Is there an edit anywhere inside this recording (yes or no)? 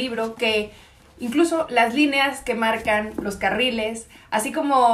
no